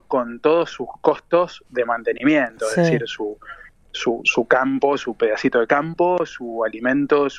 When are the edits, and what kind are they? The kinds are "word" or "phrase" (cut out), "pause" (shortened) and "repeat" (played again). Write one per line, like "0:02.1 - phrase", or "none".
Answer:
none

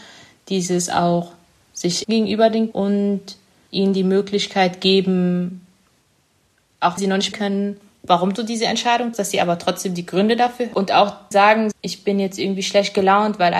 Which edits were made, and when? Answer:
0:02.0 - word
0:02.7 - word
0:07.0 - word
0:07.3 - word
0:08.4 - word
0:09.1 - word
0:10.7 - word
0:11.3 - word
0:11.7 - word

